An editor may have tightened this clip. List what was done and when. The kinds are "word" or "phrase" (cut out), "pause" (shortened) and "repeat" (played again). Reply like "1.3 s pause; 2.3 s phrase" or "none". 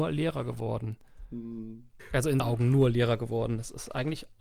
2.4 s word